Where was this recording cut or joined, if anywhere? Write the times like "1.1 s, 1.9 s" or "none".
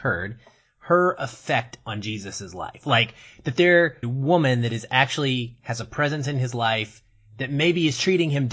4.0 s